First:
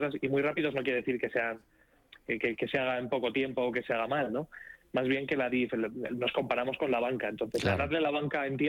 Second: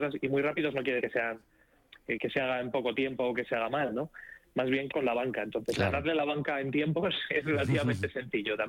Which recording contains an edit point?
second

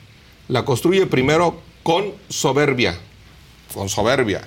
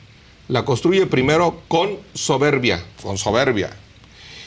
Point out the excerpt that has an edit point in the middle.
second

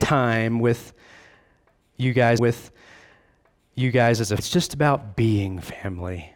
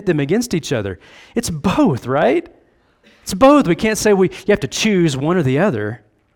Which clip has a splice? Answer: first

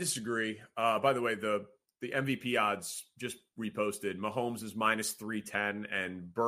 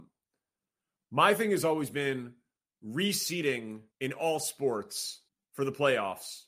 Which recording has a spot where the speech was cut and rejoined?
second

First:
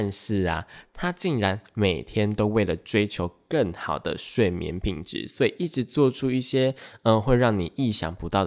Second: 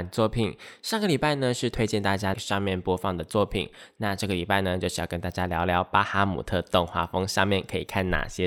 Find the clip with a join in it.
second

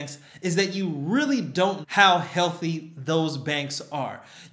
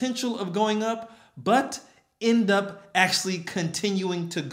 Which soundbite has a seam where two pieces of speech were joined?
first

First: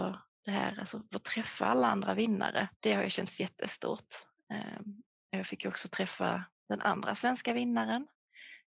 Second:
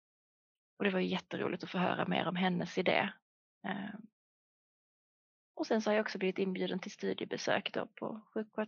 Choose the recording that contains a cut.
first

